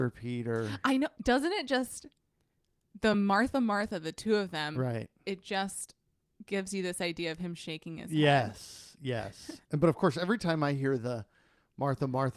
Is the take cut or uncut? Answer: uncut